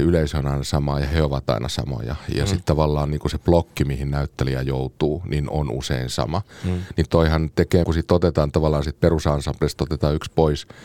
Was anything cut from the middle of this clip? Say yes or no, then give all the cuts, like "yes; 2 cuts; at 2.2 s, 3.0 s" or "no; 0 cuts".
yes; 1 cut; at 7.8 s